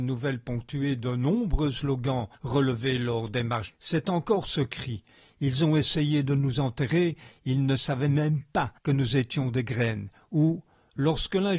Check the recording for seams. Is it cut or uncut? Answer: cut